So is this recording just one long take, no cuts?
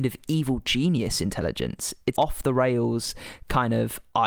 no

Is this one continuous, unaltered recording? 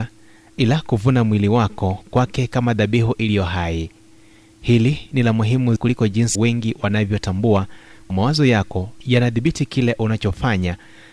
no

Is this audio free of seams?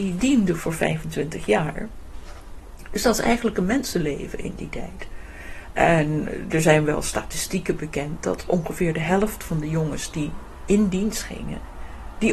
yes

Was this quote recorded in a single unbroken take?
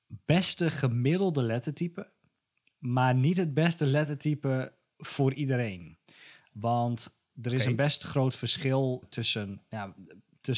no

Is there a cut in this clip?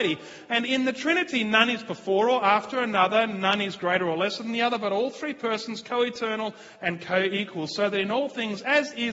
no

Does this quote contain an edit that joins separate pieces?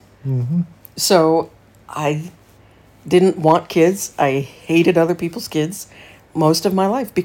no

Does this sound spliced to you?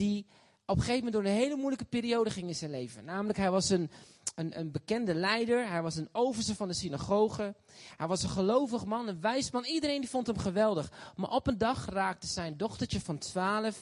no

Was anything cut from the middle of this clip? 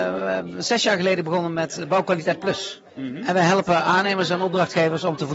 yes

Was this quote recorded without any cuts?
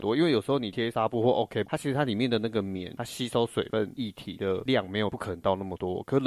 no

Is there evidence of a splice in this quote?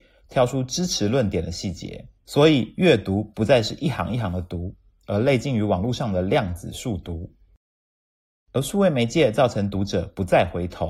yes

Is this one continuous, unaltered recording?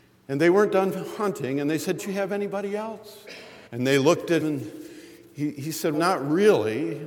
no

